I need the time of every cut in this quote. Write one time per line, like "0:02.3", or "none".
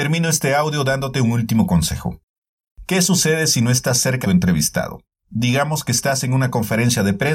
0:04.2